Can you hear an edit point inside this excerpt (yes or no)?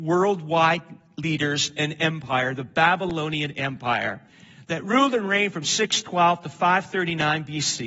no